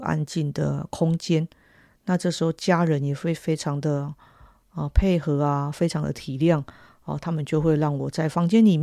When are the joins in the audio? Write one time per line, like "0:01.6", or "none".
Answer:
none